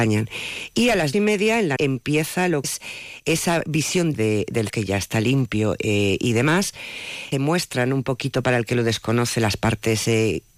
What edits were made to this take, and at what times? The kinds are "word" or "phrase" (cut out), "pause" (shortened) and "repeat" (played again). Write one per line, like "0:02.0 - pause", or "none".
0:01.1 - word
0:01.8 - phrase
0:02.6 - word
0:04.1 - phrase
0:04.7 - word
0:07.3 - word